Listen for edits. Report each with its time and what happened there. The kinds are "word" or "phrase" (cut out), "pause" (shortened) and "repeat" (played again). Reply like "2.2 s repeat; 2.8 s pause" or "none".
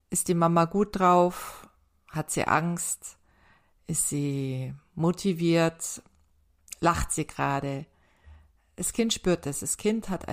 none